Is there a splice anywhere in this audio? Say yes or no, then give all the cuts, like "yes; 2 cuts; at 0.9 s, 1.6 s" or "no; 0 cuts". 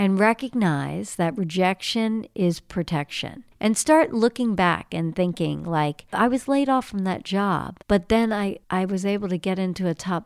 yes; 3 cuts; at 3.5 s, 7.8 s, 8.6 s